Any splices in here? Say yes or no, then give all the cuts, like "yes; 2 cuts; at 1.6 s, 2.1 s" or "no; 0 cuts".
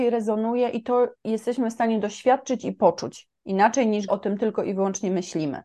yes; 2 cuts; at 1.1 s, 4.1 s